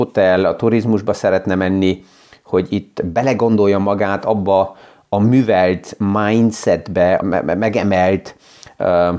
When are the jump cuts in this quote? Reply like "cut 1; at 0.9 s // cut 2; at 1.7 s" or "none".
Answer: cut 1; at 7.2 s